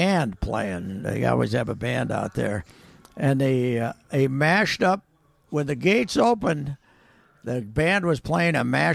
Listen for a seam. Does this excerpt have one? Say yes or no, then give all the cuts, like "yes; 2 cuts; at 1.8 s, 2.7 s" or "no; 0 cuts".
no; 0 cuts